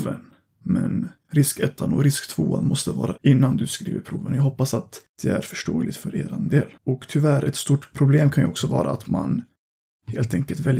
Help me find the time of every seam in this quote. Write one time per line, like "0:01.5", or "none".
0:01.2
0:03.2
0:05.1
0:06.8

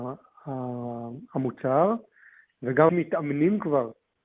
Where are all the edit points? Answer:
0:02.9

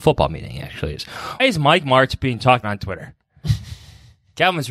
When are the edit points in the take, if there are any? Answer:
0:01.4
0:02.6

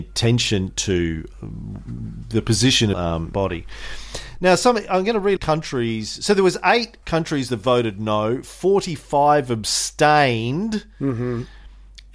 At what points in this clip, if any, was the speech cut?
0:01.3
0:02.9
0:03.3
0:05.4
0:07.0

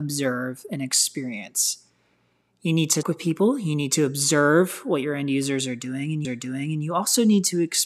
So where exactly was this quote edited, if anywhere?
0:03.0
0:06.2

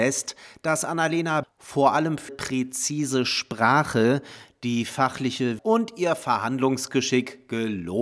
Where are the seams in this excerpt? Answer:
0:01.4
0:02.3
0:05.6

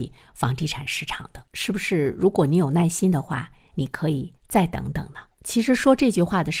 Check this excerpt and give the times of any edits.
0:01.5
0:04.4
0:05.3

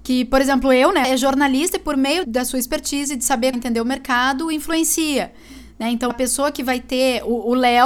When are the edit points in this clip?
0:01.0
0:02.2
0:03.5
0:06.1

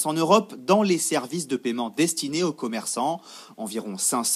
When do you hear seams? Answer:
none

